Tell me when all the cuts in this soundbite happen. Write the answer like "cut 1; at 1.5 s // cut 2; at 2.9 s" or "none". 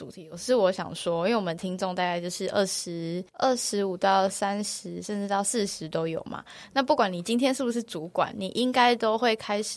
cut 1; at 3.3 s